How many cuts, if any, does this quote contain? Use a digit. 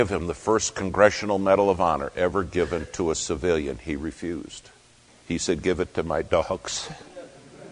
1